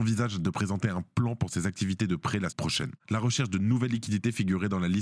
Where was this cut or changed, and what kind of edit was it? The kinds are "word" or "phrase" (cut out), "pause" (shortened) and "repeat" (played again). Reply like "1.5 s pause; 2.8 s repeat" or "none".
2.5 s word